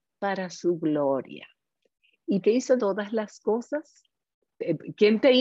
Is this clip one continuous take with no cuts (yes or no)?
no